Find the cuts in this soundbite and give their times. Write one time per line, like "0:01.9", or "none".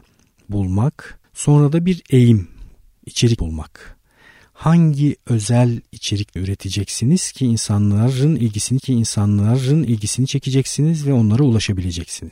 0:01.2
0:03.4
0:06.4
0:08.8